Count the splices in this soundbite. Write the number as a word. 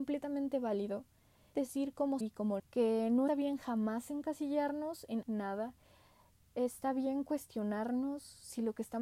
five